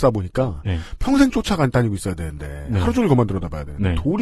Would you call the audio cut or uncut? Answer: uncut